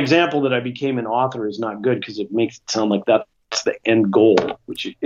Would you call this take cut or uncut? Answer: uncut